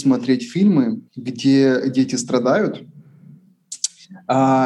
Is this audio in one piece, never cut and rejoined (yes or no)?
no